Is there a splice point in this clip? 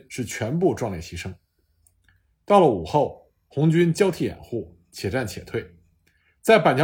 no; 0 cuts

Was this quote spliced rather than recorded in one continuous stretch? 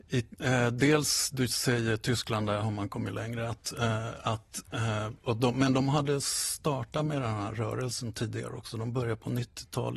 no; 0 cuts

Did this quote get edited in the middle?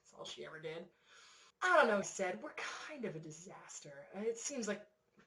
yes; 2 cuts; at 1.5 s, 2.0 s

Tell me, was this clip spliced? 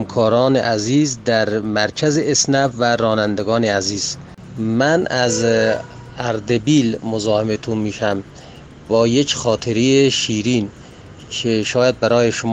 no; 0 cuts

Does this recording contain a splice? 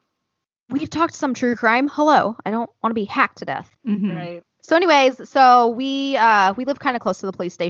yes; 1 cut; at 3.8 s

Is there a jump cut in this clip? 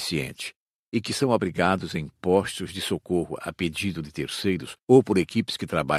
yes; 1 cut; at 4.8 s

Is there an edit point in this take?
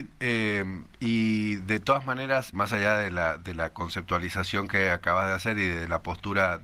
yes; 2 cuts; at 0.9 s, 2.5 s

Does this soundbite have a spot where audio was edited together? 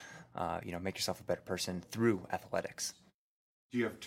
no; 0 cuts

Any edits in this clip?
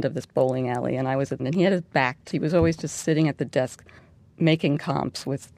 yes; 3 cuts; at 1.4 s, 2.3 s, 4.0 s

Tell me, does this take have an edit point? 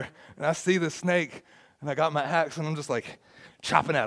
no; 0 cuts

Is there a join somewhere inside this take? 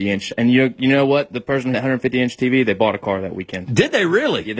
yes; 1 cut; at 1.7 s

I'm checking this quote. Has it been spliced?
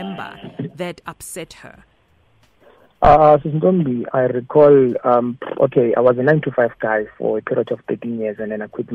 yes; 1 cut; at 4.1 s

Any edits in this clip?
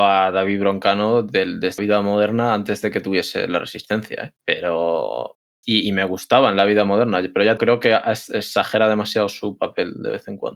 yes; 3 cuts; at 1.8 s, 4.4 s, 7.6 s

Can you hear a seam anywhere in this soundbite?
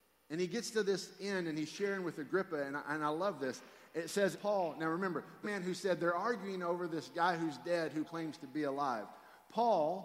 yes; 3 cuts; at 4.3 s, 5.4 s, 8.0 s

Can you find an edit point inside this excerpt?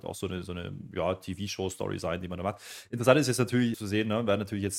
yes; 1 cut; at 3.7 s

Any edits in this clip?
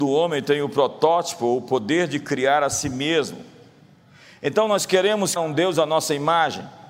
yes; 1 cut; at 5.4 s

